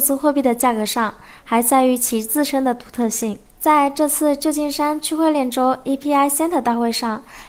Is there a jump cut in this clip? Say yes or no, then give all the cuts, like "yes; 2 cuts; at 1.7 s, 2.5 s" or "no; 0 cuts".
yes; 1 cut; at 3.5 s